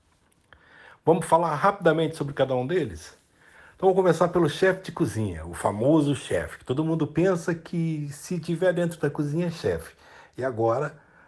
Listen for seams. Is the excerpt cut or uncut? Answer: uncut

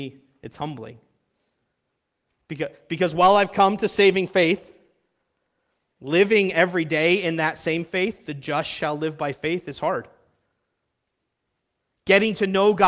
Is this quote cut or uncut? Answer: uncut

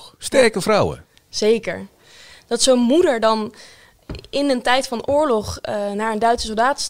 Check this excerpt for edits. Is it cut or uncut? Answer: uncut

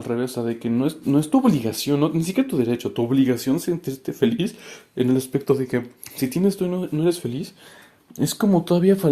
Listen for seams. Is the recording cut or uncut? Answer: uncut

